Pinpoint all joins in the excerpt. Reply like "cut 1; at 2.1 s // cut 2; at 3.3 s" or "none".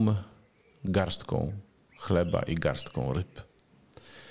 none